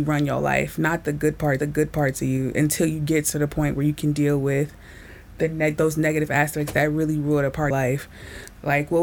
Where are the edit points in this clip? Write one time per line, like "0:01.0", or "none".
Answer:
0:01.6
0:07.7

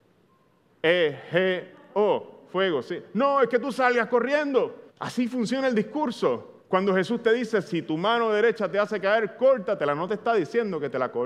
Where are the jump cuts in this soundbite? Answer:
0:04.9
0:06.6

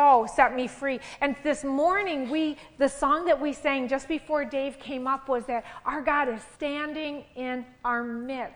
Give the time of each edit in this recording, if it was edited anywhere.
0:06.5

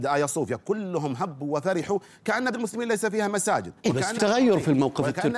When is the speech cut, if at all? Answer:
0:02.5
0:03.8
0:04.2

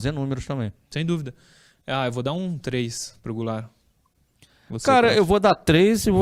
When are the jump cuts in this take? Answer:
none

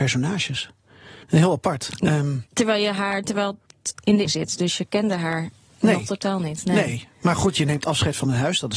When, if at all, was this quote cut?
0:01.2
0:04.2

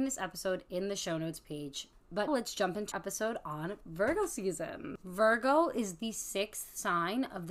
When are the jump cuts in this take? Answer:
0:02.3
0:02.9

